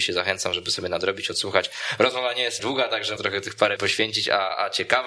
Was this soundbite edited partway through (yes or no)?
yes